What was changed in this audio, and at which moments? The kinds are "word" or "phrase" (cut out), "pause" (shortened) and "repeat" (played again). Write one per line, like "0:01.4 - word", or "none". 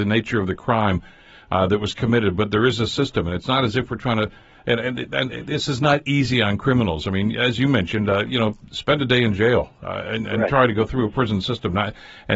none